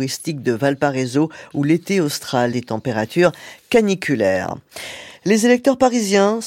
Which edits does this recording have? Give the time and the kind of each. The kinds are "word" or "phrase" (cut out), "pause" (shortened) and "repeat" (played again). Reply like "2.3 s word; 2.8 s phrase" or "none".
2.5 s phrase; 5.2 s pause